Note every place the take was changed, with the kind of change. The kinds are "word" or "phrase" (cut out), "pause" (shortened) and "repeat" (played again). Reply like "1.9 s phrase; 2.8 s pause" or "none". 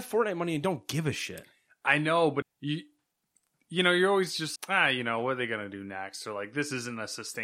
2.4 s phrase; 4.6 s word